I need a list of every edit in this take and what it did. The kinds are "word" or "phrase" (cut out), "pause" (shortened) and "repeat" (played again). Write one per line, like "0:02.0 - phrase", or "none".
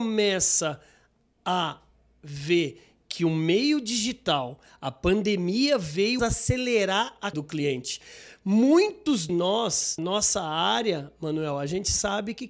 0:06.2 - word
0:07.3 - word
0:09.3 - word
0:10.0 - word